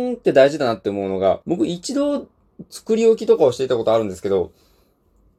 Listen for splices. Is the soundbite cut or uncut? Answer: cut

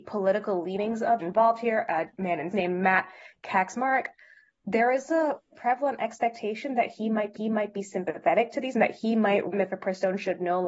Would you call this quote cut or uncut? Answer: cut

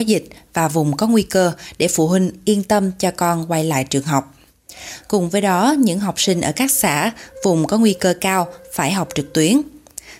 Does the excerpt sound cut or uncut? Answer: uncut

